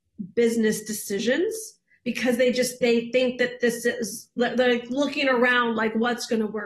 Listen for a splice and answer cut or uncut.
uncut